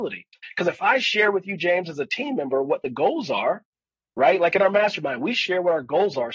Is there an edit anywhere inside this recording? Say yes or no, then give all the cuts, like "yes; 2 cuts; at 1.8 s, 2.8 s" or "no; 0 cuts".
no; 0 cuts